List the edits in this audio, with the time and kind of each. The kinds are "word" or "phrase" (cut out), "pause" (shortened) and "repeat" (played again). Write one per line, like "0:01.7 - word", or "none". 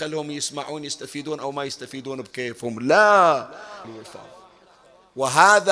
0:03.8 - phrase